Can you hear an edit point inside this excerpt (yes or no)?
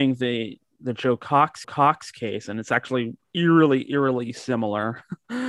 yes